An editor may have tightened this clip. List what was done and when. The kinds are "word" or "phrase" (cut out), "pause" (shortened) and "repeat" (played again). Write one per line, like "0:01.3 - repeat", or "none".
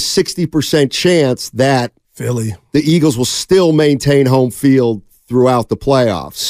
none

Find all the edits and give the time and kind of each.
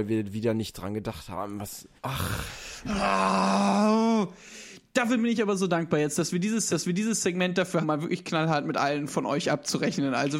0:02.0 - pause
0:06.7 - repeat
0:07.8 - phrase

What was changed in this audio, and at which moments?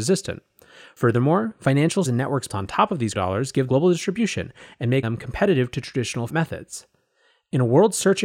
0:02.0 - word
0:02.5 - word
0:03.1 - word
0:03.7 - word
0:05.0 - word
0:06.3 - word

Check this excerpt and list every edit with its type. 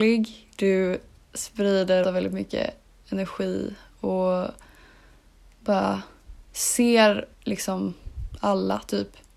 0:02.0 - word
0:07.3 - pause

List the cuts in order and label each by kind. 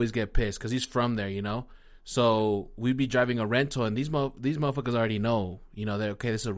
none

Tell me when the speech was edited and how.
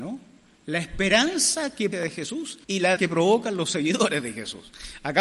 0:01.9 - phrase
0:02.6 - pause
0:03.0 - word

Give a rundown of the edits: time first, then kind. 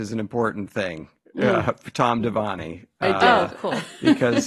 none

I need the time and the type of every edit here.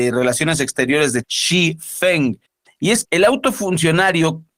0:01.2 - word
0:02.5 - pause
0:03.0 - word

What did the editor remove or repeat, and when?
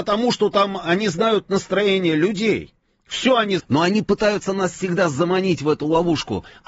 0:03.6 - word

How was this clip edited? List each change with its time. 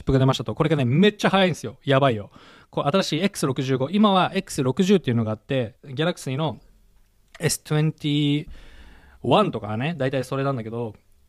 0:05.8 - pause

